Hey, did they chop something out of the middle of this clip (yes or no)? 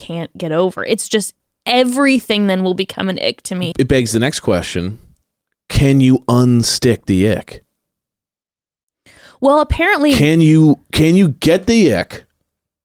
no